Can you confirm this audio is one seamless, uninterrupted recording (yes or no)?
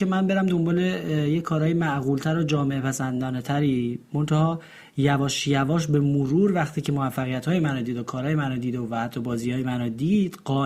yes